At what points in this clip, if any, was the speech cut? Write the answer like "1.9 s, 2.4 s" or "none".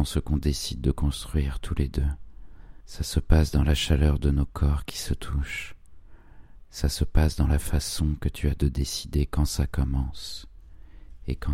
2.8 s